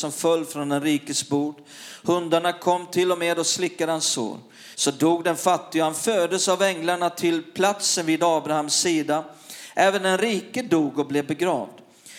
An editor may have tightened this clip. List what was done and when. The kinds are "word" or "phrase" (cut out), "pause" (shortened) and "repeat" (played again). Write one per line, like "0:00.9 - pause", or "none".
0:04.7 - pause